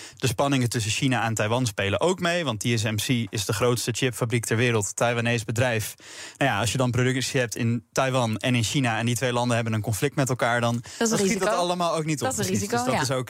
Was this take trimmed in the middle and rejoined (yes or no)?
no